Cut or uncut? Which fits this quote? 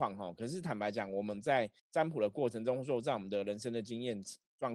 cut